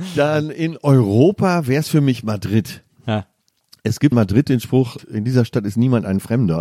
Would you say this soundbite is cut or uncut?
cut